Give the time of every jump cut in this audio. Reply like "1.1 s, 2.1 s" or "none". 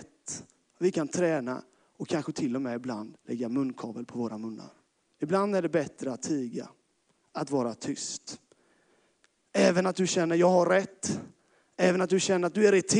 3.2 s, 4.9 s